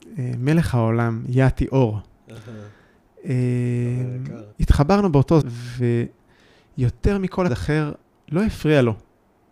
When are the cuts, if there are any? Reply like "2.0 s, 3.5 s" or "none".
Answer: 4.5 s, 5.4 s, 7.5 s, 8.0 s